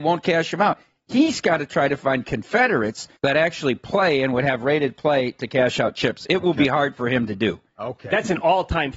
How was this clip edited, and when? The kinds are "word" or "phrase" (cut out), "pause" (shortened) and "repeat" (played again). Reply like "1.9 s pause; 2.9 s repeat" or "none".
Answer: 3.2 s pause